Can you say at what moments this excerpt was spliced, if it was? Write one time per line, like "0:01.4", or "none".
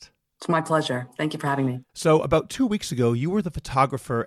0:01.9

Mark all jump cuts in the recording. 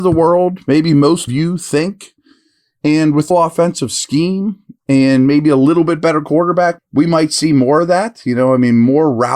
0:01.3
0:03.3
0:06.8

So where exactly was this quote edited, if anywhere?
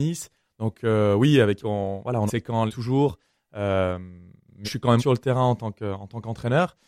0:01.6
0:02.3
0:02.7
0:04.6
0:05.0

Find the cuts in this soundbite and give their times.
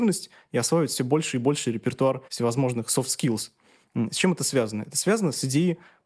0:02.3

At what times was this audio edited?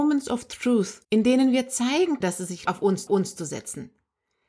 0:01.0
0:02.2
0:02.7
0:03.1

